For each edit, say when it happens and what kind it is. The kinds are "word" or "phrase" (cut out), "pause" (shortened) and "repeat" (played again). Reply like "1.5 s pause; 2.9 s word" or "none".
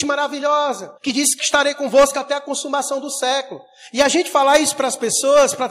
1.0 s pause; 1.4 s word